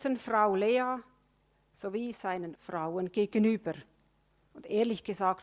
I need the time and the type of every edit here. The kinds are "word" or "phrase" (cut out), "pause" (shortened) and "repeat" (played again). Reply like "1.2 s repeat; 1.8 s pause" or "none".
2.5 s word